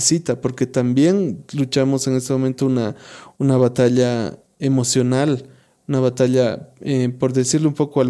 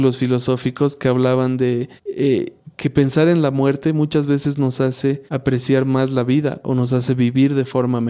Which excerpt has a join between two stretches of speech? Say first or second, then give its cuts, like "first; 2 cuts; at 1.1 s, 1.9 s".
second; 2 cuts; at 2.0 s, 5.3 s